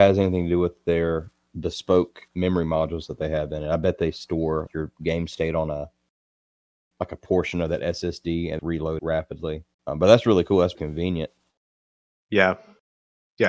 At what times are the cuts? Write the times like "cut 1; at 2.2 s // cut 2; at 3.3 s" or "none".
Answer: cut 1; at 2.3 s // cut 2; at 4.7 s // cut 3; at 8.6 s // cut 4; at 9.0 s // cut 5; at 9.7 s // cut 6; at 10.7 s